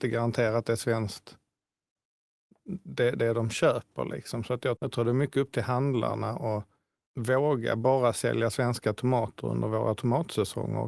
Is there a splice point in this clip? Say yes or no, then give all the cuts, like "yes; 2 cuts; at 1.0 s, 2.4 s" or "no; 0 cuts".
yes; 2 cuts; at 4.8 s, 7.1 s